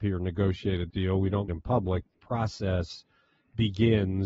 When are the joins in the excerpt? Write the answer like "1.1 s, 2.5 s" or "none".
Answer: 0.9 s, 1.5 s, 2.1 s